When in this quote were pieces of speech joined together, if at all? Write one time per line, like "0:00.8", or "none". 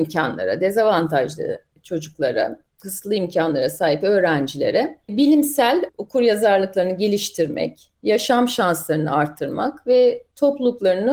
none